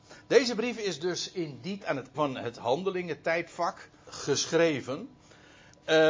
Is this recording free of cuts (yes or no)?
no